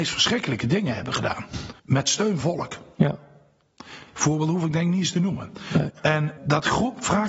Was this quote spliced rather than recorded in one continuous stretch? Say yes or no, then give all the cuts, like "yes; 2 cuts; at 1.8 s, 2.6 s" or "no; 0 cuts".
yes; 4 cuts; at 1.8 s, 2.4 s, 4.1 s, 6.4 s